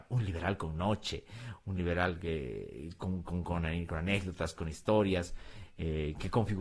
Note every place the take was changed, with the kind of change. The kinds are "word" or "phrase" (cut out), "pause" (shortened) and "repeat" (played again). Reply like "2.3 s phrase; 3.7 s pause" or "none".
none